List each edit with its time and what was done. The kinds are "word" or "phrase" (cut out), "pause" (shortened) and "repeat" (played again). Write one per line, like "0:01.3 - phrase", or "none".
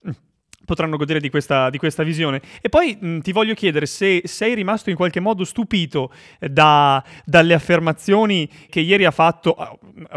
0:08.7 - word